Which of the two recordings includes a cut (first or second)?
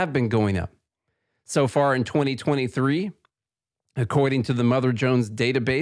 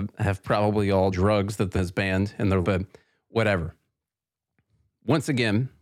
second